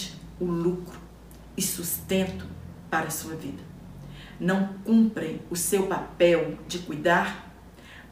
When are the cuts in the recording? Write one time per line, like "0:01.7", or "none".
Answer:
none